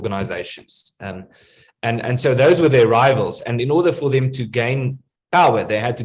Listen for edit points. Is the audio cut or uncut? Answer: uncut